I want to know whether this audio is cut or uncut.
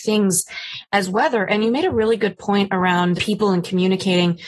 cut